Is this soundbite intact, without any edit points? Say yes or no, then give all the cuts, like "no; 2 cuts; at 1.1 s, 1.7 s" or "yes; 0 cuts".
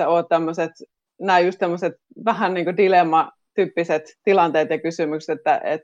yes; 0 cuts